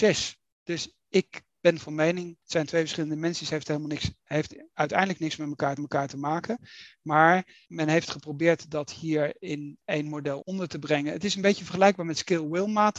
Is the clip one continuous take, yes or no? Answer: no